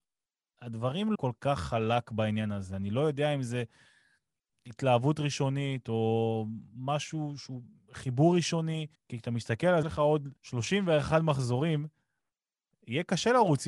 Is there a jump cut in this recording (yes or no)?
yes